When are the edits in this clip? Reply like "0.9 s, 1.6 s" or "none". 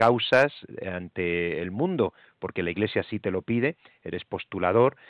none